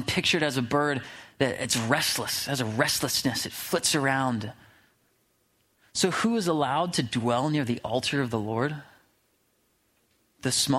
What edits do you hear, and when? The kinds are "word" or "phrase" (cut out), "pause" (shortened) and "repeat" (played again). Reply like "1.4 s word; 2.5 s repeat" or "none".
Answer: none